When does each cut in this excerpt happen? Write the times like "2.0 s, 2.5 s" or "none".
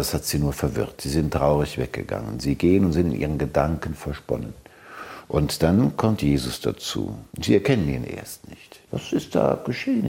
7.3 s, 8.9 s